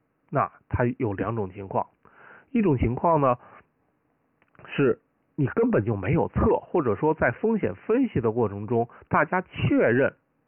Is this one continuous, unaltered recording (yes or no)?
yes